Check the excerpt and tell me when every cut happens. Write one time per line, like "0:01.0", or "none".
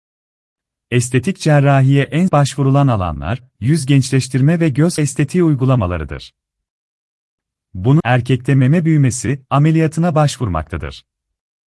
0:02.3
0:03.6
0:05.0
0:08.0